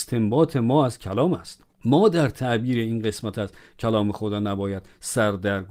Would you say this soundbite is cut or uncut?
cut